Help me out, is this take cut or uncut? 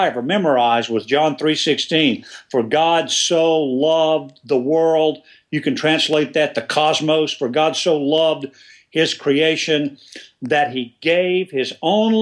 uncut